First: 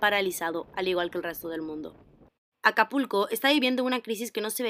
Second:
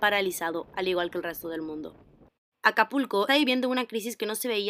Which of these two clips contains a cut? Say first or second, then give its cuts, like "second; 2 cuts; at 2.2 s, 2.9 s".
second; 1 cut; at 3.3 s